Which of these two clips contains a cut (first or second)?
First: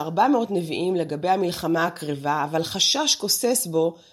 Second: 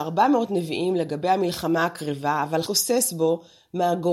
second